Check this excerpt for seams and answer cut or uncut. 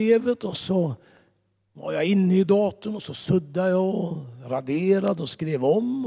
uncut